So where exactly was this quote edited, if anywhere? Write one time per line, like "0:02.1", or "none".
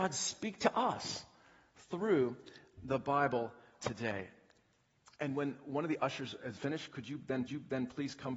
0:03.8
0:06.6
0:07.5